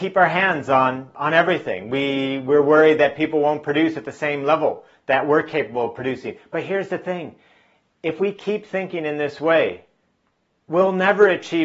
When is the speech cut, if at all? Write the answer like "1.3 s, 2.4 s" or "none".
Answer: none